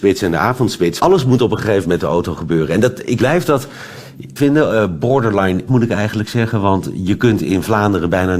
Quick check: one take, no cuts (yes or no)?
no